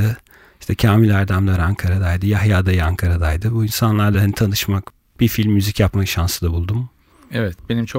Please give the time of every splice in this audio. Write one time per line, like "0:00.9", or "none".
none